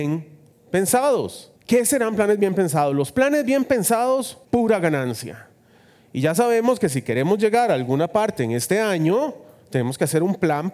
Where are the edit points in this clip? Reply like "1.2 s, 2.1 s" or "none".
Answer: 1.6 s, 4.4 s

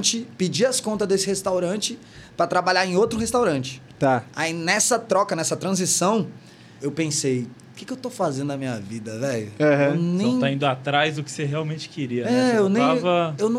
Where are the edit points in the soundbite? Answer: 6.8 s

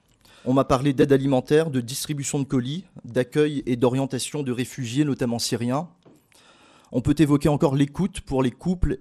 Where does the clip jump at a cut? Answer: none

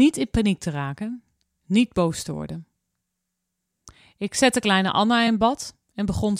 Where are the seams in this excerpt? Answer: none

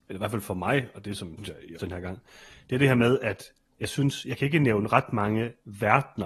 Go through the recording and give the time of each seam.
1.4 s, 1.8 s

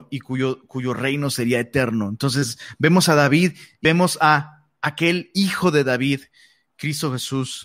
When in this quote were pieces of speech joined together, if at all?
none

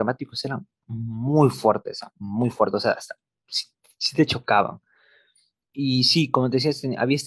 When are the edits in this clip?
none

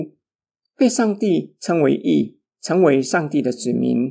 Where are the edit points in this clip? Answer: none

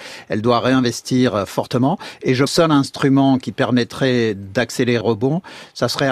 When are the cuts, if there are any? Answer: 2.5 s, 5.0 s

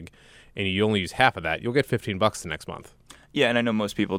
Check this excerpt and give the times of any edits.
none

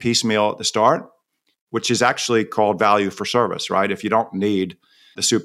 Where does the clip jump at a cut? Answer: none

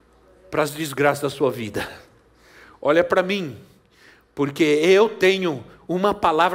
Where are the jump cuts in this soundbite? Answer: none

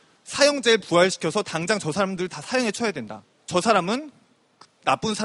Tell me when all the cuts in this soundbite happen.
3.4 s

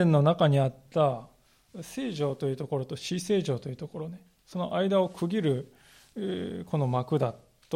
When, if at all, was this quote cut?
none

